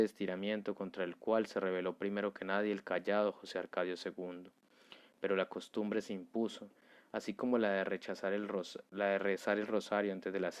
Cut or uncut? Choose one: uncut